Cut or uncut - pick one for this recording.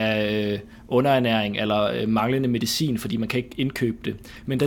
uncut